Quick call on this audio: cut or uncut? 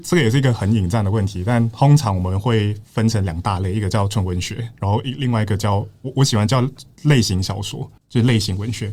cut